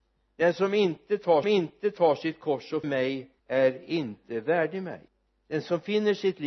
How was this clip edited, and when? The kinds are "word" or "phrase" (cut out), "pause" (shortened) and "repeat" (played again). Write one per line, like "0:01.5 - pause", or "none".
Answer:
0:01.4 - repeat
0:02.8 - word
0:03.4 - pause
0:05.1 - pause